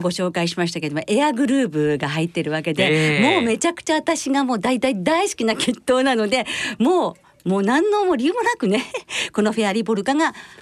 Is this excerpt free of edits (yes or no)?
yes